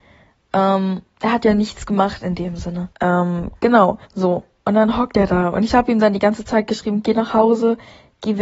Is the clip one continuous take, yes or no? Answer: no